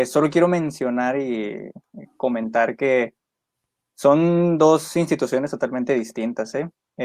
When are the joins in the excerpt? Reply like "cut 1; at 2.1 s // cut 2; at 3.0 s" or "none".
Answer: none